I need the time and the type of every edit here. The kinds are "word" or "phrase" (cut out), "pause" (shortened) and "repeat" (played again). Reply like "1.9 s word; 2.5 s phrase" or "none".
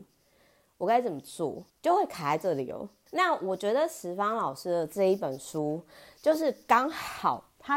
1.7 s pause; 3.1 s pause